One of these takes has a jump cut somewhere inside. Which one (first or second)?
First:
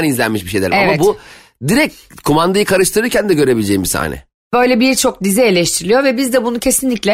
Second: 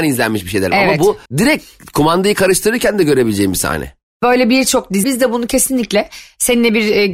second